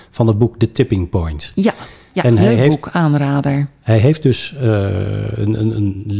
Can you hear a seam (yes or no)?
no